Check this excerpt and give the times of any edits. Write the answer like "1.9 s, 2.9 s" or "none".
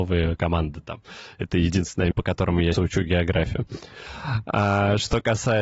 2.1 s, 2.7 s

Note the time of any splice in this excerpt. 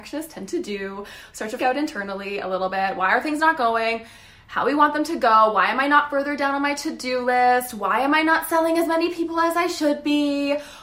1.6 s

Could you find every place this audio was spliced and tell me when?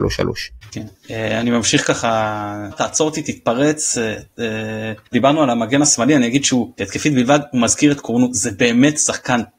2.7 s, 5.1 s, 6.8 s

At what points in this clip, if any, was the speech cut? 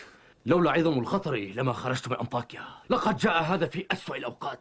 2.8 s

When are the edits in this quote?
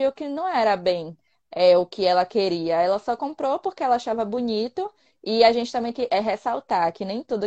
5.9 s

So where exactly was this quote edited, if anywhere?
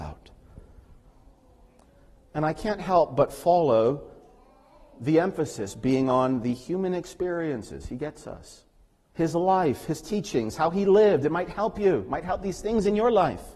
none

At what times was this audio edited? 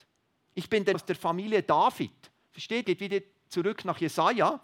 0.9 s, 2.8 s

